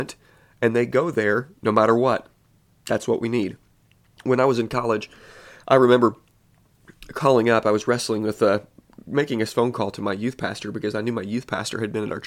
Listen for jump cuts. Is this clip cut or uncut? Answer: uncut